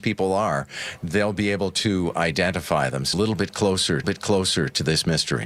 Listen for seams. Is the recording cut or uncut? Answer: cut